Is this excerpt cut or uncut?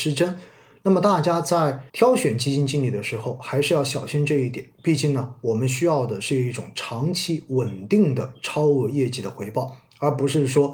cut